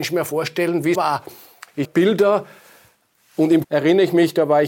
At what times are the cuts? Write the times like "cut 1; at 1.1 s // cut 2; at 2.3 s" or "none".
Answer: cut 1; at 0.9 s // cut 2; at 1.8 s // cut 3; at 3.6 s